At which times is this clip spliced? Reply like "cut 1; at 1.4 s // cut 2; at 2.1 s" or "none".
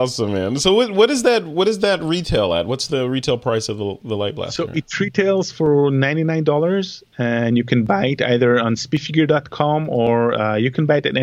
none

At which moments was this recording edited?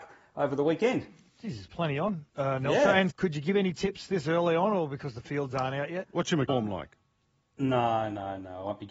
cut 1; at 2.3 s // cut 2; at 3.1 s // cut 3; at 6.5 s

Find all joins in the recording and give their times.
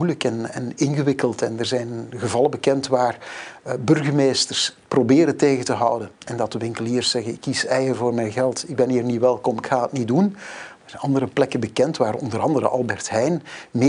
cut 1; at 6.2 s

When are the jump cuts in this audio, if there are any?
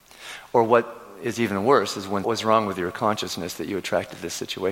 cut 1; at 2.2 s

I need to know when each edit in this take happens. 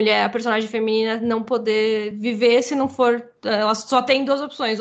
none

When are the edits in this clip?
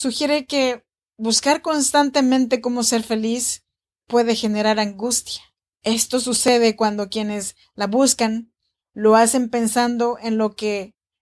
none

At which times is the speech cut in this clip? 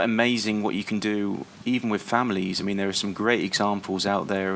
none

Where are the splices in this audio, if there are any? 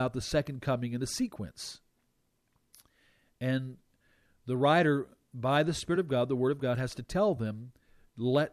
none

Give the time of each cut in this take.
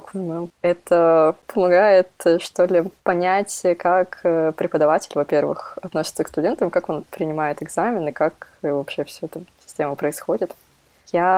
cut 1; at 3.0 s

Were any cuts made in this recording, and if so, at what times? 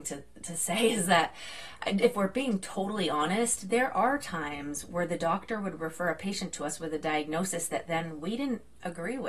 none

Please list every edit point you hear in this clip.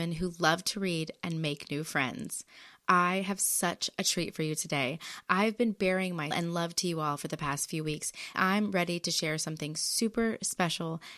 cut 1; at 6.3 s // cut 2; at 8.3 s

